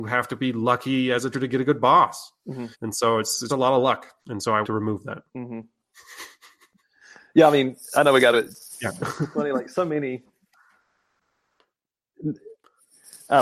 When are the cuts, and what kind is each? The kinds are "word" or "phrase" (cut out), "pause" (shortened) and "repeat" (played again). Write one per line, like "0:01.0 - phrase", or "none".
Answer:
0:01.3 - word
0:02.7 - pause
0:03.5 - word
0:04.2 - pause
0:04.6 - phrase
0:05.3 - pause
0:08.3 - phrase